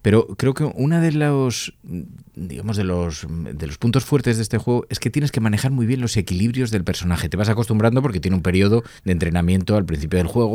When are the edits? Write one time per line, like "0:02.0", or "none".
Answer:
0:09.0

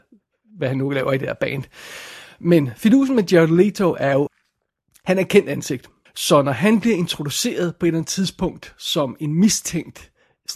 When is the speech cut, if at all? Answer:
0:04.3
0:06.1

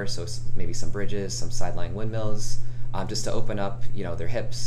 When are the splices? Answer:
none

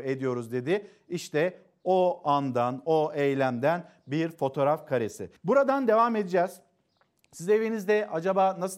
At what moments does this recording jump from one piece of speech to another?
0:05.4

